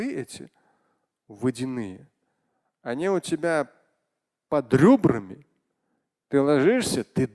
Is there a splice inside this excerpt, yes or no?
no